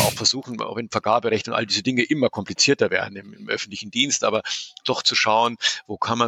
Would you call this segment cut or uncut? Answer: uncut